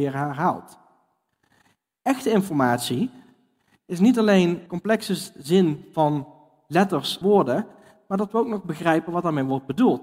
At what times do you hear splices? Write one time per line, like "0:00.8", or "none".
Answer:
0:04.7
0:07.2